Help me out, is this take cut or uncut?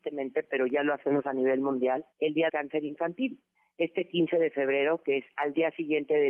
cut